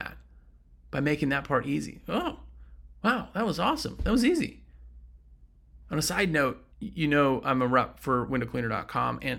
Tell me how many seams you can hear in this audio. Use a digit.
1